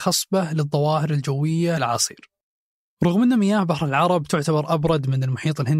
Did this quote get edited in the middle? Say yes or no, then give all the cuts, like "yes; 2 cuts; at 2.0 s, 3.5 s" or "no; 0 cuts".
yes; 1 cut; at 1.8 s